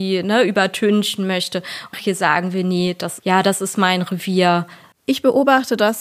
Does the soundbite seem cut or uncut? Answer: cut